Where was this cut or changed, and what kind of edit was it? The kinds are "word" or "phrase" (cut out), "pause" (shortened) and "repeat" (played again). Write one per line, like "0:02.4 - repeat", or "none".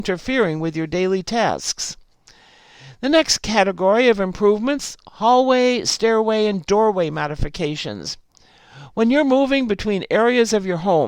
none